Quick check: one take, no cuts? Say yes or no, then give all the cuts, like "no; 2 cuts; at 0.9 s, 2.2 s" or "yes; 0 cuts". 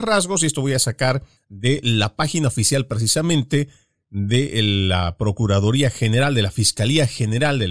yes; 0 cuts